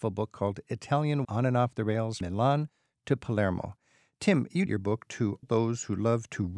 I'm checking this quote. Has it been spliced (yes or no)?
yes